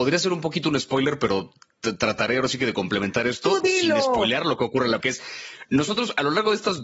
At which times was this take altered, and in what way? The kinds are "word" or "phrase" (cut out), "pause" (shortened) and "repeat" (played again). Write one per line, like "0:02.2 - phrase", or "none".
0:05.0 - word